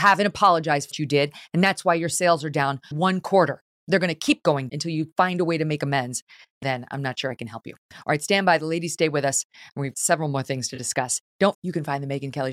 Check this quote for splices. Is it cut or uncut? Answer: cut